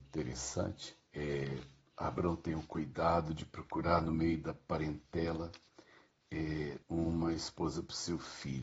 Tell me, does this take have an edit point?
yes; 2 cuts; at 1.0 s, 6.8 s

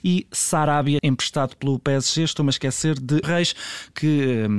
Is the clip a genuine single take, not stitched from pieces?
no; 2 cuts; at 1.0 s, 3.2 s

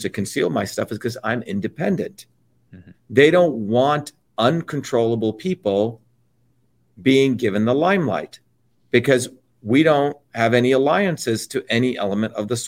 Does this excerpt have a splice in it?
no; 0 cuts

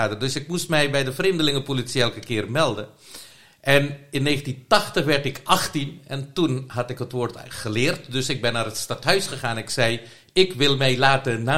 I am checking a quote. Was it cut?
no; 0 cuts

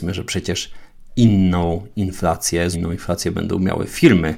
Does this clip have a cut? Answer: yes; 1 cut; at 2.7 s

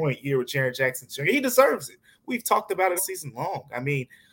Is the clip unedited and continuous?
no; 1 cut; at 3.0 s

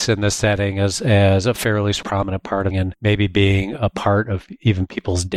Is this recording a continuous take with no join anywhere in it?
no; 1 cut; at 2.7 s

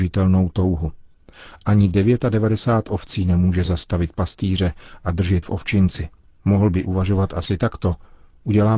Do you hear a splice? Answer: yes; 1 cut; at 5.4 s

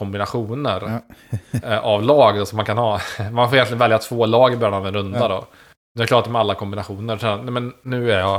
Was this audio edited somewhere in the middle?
no; 0 cuts

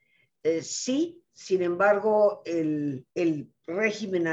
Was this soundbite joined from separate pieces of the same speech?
yes; 1 cut; at 3.1 s

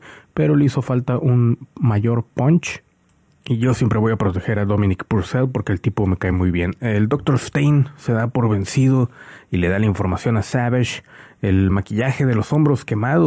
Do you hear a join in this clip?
no; 0 cuts

